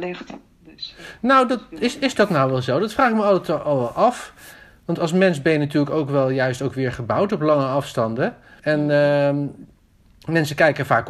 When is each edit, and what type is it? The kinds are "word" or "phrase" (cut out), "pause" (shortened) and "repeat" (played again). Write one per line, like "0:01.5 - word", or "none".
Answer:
0:08.6 - pause